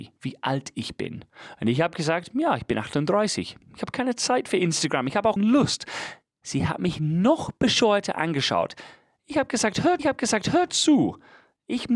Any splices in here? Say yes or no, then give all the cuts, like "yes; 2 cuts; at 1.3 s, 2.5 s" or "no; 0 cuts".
yes; 2 cuts; at 5.4 s, 10.0 s